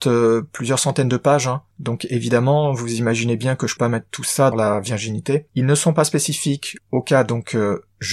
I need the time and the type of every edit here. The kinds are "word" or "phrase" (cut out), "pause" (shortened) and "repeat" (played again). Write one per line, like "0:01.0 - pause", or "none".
0:03.8 - word
0:04.5 - phrase
0:05.5 - pause